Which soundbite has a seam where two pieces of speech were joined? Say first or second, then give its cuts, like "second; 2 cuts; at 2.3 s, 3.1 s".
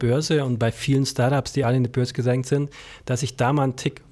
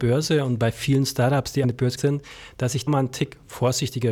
second; 3 cuts; at 1.6 s, 2.0 s, 2.9 s